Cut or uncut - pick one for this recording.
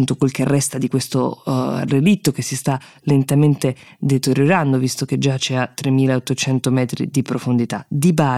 uncut